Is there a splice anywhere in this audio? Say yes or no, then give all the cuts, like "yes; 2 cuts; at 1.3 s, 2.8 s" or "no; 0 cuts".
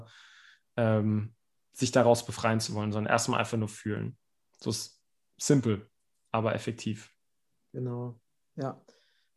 no; 0 cuts